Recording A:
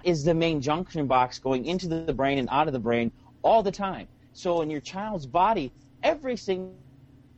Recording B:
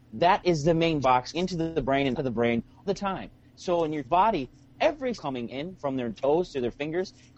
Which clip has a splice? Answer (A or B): B